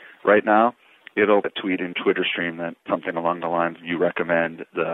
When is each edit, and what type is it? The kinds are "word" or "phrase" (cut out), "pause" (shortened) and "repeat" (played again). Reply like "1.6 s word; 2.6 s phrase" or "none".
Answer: 1.4 s word; 1.9 s word; 2.9 s word; 3.8 s word